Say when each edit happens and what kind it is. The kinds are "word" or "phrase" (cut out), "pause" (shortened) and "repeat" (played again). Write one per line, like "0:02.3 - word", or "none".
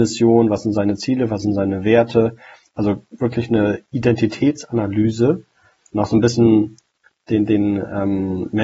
none